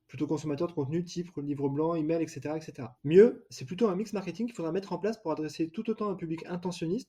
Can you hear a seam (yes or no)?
yes